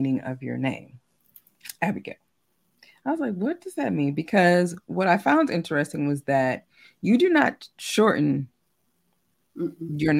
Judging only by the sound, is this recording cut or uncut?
uncut